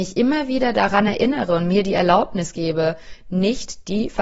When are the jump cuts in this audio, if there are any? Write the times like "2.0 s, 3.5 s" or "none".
none